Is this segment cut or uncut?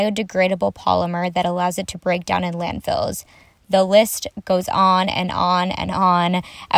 uncut